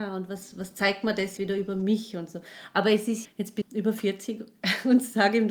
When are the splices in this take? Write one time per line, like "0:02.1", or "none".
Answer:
0:01.4
0:03.2
0:03.6